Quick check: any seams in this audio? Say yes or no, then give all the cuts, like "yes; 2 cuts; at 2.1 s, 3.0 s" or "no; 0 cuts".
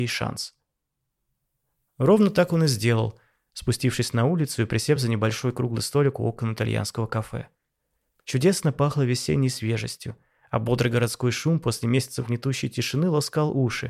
no; 0 cuts